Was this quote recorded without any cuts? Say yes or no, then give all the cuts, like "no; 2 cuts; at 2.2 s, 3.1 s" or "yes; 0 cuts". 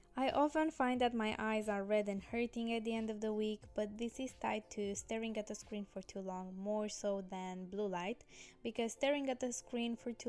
yes; 0 cuts